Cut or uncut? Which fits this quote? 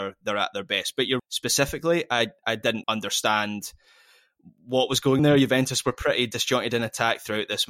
cut